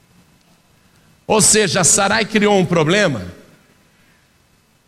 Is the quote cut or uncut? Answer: uncut